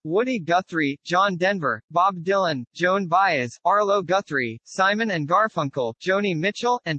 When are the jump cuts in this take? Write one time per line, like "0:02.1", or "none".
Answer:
none